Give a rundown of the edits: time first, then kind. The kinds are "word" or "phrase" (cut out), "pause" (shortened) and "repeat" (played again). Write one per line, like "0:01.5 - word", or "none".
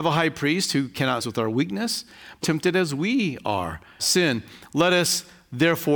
0:01.2 - word
0:02.4 - phrase
0:04.0 - phrase